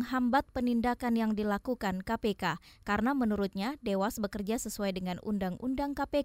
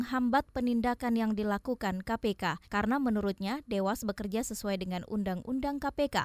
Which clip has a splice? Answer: second; 1 cut; at 2.6 s

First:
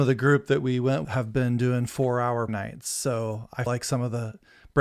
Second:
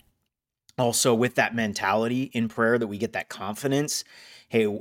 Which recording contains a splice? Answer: first; 3 cuts; at 1.0 s, 2.5 s, 3.7 s

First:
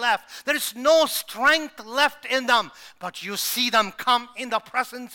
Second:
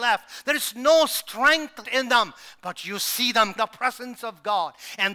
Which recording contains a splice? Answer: second; 2 cuts; at 1.8 s, 3.6 s

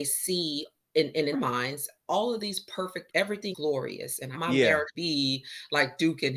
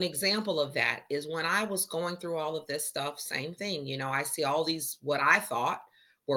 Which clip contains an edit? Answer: first; 5 cuts; at 1.3 s, 3.1 s, 3.5 s, 4.3 s, 4.9 s

